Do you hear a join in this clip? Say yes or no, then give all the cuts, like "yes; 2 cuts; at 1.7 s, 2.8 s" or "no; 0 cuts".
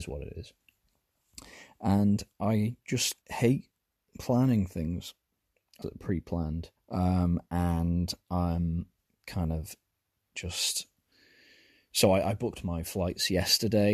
yes; 3 cuts; at 3.2 s, 5.8 s, 6.8 s